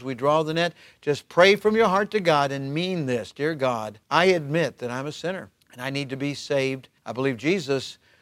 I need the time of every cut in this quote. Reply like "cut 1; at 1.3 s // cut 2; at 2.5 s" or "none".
cut 1; at 4.0 s // cut 2; at 5.6 s // cut 3; at 7.0 s